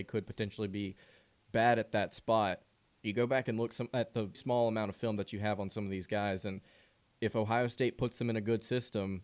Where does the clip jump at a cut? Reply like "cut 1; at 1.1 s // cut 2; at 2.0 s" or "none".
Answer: cut 1; at 4.3 s

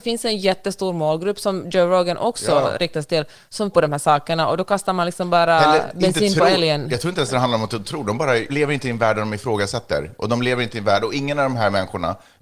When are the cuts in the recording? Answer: cut 1; at 3.7 s // cut 2; at 8.5 s

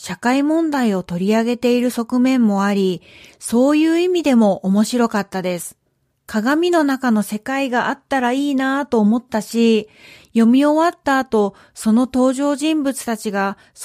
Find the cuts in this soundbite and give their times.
cut 1; at 6.1 s

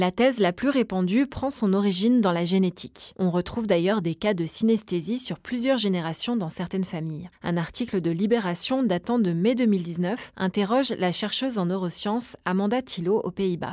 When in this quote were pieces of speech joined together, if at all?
none

